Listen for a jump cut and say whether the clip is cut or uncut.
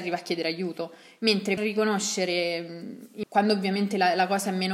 cut